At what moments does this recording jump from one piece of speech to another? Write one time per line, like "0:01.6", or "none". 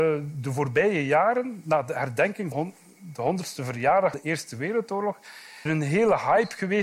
0:02.5
0:04.1
0:05.7